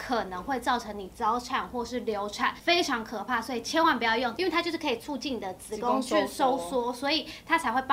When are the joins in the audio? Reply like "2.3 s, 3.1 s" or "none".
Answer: none

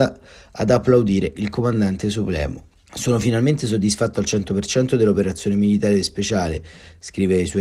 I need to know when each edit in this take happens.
none

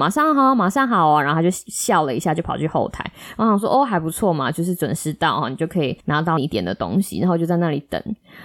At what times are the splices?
6.0 s

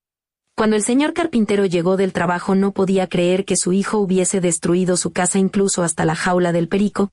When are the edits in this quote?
none

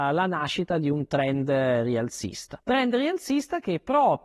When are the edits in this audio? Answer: 2.6 s

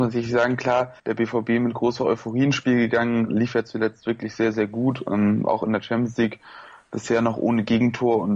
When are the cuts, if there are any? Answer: 1.0 s

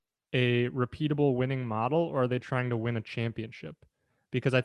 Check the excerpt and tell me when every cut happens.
none

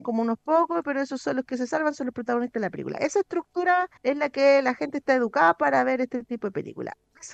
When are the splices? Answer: 4.0 s

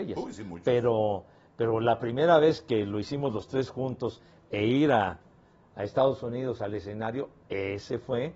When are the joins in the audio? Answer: none

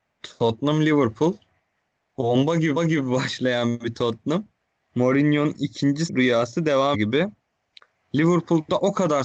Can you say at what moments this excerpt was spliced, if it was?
2.8 s, 4.7 s, 6.1 s, 6.9 s

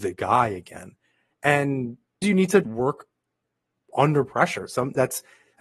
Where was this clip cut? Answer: 2.2 s, 2.6 s

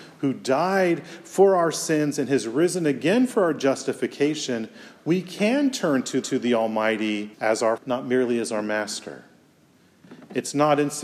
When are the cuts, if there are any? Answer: 6.2 s, 7.3 s, 7.8 s

